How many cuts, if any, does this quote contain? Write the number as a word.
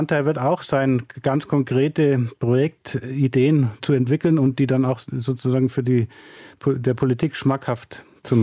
one